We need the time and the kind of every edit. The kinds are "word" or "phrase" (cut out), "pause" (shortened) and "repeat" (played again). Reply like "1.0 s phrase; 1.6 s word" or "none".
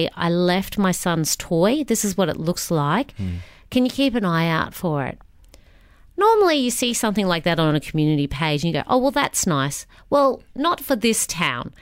none